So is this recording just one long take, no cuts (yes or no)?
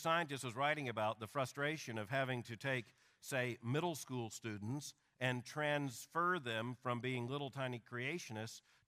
yes